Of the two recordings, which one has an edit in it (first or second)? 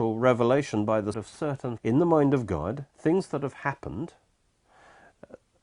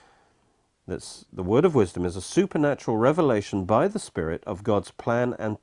first